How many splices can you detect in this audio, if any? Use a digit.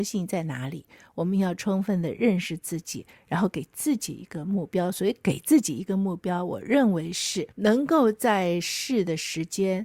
1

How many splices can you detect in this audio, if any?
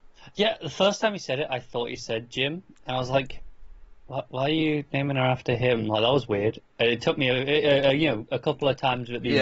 0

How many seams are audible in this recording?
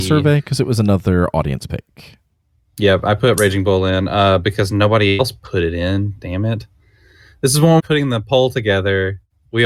2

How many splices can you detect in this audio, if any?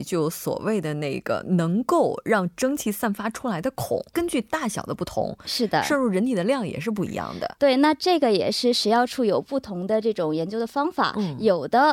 1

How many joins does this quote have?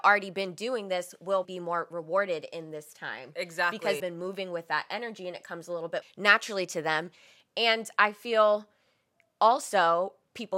3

